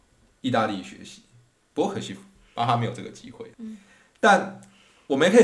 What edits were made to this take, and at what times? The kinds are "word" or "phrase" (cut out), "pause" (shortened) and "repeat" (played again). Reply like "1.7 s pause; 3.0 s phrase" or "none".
3.5 s pause